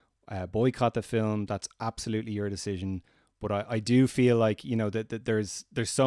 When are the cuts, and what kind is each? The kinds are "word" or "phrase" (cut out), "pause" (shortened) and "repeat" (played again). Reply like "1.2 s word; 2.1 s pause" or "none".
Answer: none